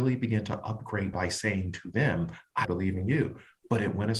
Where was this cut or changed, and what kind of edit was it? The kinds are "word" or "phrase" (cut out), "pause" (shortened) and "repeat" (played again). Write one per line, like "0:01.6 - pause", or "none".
0:01.1 - phrase
0:02.6 - phrase